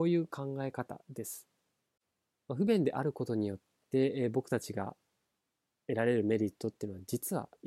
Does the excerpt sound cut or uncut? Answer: uncut